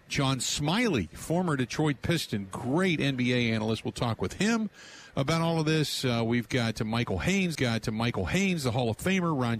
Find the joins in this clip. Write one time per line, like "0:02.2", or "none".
0:07.5